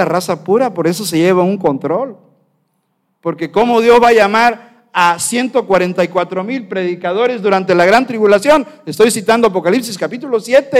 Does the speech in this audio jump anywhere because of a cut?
no; 0 cuts

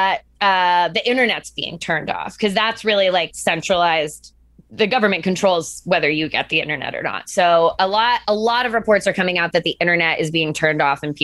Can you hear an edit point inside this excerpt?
no; 0 cuts

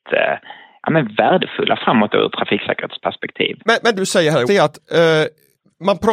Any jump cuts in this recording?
yes; 3 cuts; at 3.6 s, 4.0 s, 4.5 s

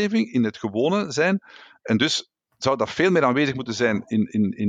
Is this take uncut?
yes; 0 cuts

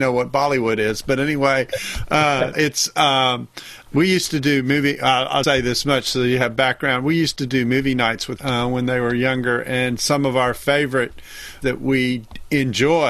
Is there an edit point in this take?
yes; 5 cuts; at 2.5 s, 3.9 s, 5.4 s, 8.4 s, 11.6 s

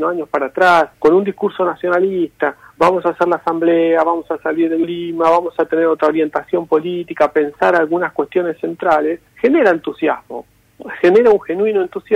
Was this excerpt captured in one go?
no; 3 cuts; at 0.9 s, 4.8 s, 9.3 s

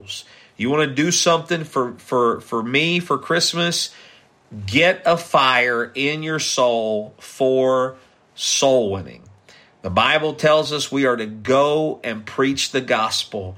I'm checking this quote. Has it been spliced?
no; 0 cuts

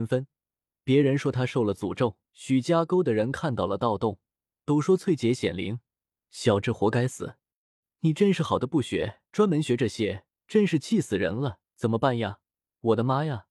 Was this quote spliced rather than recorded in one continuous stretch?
yes; 3 cuts; at 2.3 s, 9.3 s, 11.7 s

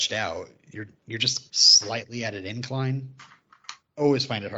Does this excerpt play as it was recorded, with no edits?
no; 2 cuts; at 1.0 s, 1.5 s

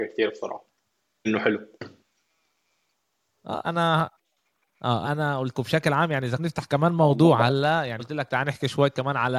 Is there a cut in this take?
yes; 6 cuts; at 1.2 s, 3.6 s, 5.0 s, 5.5 s, 6.4 s, 8.0 s

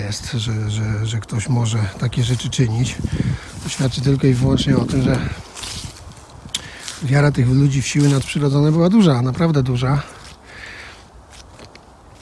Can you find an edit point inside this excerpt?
no; 0 cuts

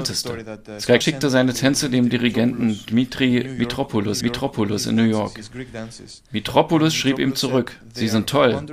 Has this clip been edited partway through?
yes; 2 cuts; at 1.0 s, 4.2 s

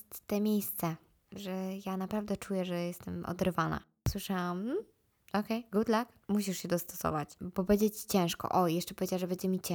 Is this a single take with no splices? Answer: yes; 0 cuts

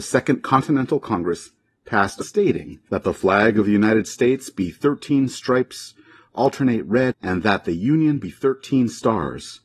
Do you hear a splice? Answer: yes; 2 cuts; at 2.2 s, 7.1 s

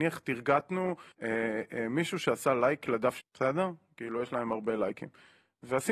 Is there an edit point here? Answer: yes; 2 cuts; at 1.1 s, 3.2 s

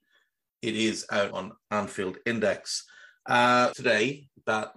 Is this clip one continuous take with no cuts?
no; 2 cuts; at 1.3 s, 3.7 s

